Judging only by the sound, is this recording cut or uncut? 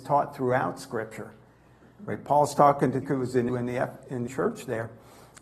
cut